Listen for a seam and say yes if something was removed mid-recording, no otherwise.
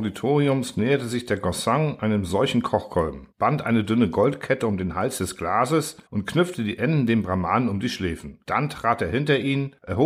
yes